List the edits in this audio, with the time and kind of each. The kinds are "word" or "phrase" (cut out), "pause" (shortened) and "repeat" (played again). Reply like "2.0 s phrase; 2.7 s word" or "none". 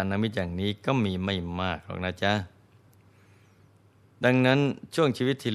none